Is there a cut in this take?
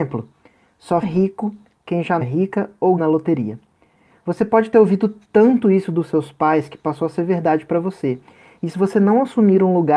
yes; 3 cuts; at 1.0 s, 2.2 s, 3.0 s

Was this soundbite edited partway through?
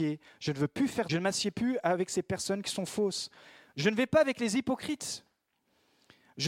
yes; 1 cut; at 1.1 s

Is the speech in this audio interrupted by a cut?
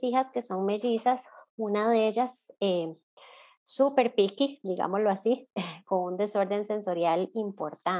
no; 0 cuts

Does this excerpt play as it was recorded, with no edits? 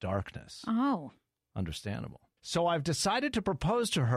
no; 1 cut; at 2.4 s

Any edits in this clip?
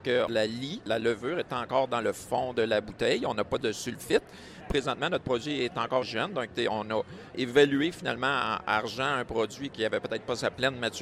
yes; 1 cut; at 6.0 s

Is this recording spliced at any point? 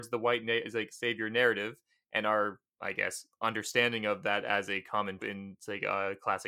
yes; 2 cuts; at 2.7 s, 5.2 s

